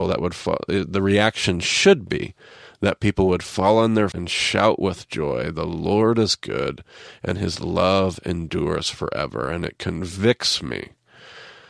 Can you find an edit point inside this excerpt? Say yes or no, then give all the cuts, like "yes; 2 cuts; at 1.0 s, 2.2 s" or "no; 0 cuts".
yes; 1 cut; at 4.1 s